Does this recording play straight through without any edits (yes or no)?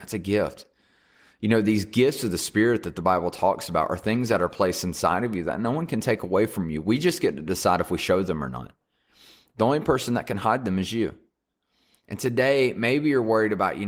yes